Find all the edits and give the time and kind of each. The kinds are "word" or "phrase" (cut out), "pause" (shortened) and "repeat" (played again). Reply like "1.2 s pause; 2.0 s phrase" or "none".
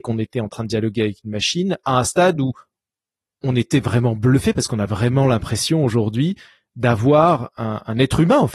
none